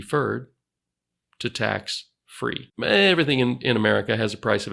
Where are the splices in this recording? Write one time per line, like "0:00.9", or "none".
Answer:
0:02.7